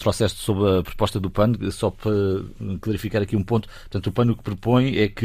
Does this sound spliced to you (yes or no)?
no